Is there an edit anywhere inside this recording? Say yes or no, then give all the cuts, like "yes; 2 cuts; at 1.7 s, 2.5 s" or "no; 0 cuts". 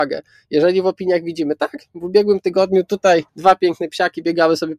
yes; 1 cut; at 3.3 s